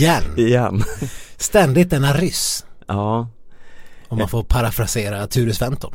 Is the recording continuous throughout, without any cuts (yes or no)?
yes